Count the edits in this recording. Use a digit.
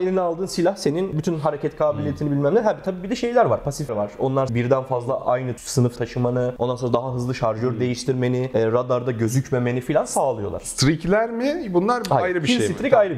3